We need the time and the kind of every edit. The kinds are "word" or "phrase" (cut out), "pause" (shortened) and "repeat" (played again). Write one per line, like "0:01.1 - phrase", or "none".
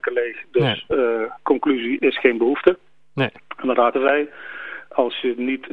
0:02.0 - word
0:03.9 - word